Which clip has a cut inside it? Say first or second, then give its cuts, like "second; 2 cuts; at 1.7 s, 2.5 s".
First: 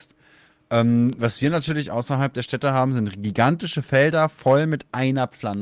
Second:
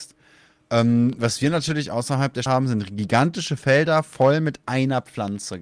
second; 1 cut; at 2.5 s